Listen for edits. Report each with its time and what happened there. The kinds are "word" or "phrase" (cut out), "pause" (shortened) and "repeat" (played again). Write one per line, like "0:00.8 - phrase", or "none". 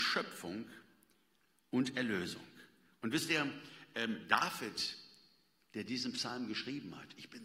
none